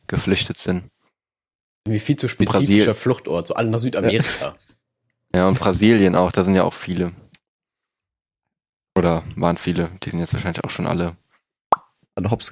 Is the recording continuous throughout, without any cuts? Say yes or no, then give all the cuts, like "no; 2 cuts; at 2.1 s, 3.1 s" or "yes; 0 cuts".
yes; 0 cuts